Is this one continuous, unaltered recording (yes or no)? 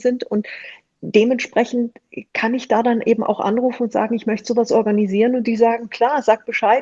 no